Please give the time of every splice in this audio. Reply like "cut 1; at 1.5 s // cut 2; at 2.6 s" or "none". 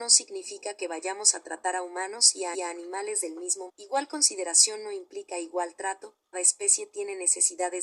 cut 1; at 2.5 s // cut 2; at 3.7 s // cut 3; at 6.3 s